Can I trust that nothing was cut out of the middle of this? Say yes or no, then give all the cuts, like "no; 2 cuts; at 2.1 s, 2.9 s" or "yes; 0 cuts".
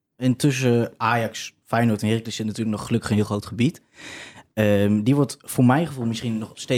yes; 0 cuts